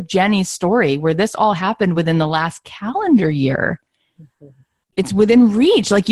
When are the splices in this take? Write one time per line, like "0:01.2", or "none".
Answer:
none